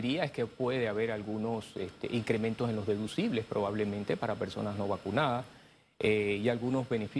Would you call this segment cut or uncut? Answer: uncut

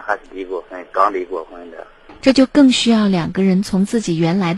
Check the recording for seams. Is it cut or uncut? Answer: cut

